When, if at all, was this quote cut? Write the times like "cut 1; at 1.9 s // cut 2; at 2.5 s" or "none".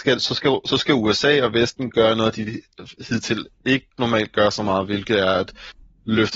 none